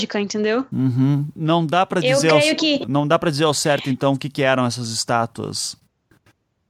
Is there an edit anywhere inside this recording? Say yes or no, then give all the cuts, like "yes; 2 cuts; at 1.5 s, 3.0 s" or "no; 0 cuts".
no; 0 cuts